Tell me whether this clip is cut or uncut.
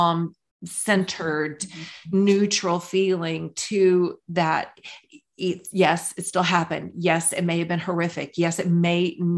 uncut